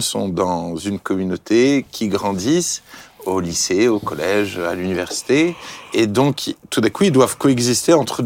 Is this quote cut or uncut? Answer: uncut